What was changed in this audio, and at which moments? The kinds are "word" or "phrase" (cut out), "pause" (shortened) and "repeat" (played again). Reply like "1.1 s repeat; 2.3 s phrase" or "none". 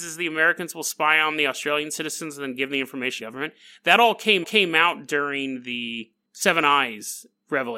3.2 s phrase; 4.4 s repeat